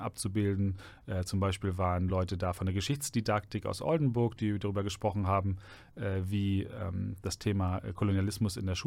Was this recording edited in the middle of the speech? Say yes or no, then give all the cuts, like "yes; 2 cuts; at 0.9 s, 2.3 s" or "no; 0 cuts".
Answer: no; 0 cuts